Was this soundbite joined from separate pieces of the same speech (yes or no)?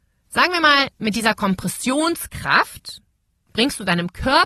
no